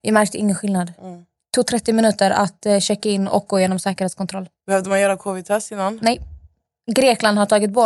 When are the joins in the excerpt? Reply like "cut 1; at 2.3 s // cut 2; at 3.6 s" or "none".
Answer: none

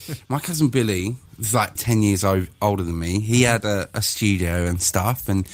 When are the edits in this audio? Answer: cut 1; at 1.3 s // cut 2; at 1.8 s

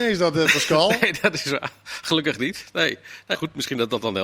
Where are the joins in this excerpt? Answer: cut 1; at 3.3 s

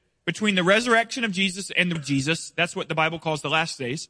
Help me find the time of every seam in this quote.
cut 1; at 2.0 s

